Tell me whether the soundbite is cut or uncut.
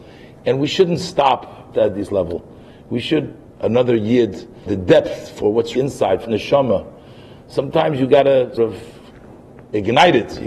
cut